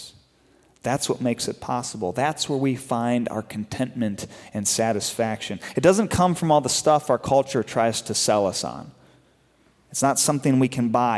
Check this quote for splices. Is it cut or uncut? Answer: uncut